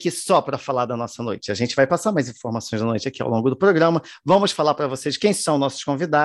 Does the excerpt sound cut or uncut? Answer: uncut